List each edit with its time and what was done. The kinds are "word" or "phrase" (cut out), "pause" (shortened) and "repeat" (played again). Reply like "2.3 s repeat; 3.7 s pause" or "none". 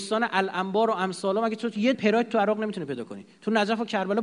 1.9 s word

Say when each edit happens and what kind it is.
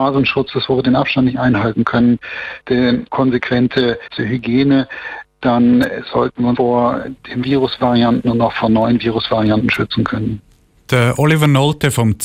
2.6 s pause; 4.2 s phrase; 6.6 s word; 7.4 s word

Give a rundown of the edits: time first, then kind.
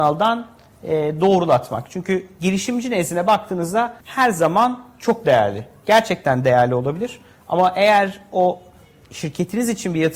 4.0 s pause

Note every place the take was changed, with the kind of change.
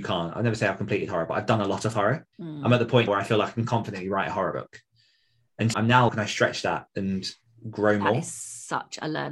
2.3 s pause; 3.1 s word; 5.7 s word; 6.1 s phrase

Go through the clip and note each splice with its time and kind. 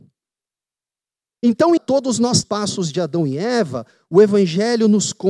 1.8 s word; 2.4 s phrase

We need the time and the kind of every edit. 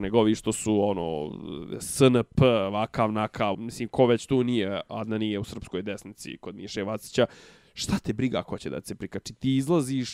3.5 s word

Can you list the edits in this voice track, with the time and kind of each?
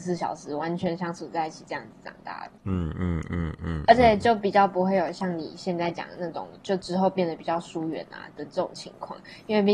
2.6 s pause

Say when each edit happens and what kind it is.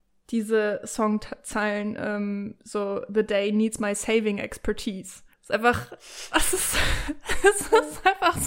5.3 s pause

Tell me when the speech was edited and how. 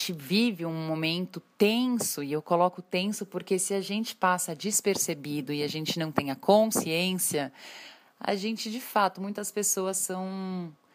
none

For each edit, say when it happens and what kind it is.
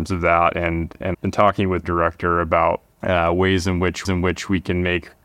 1.1 s word; 1.8 s phrase; 4.0 s repeat

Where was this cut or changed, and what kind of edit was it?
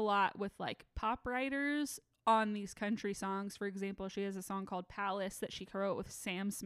none

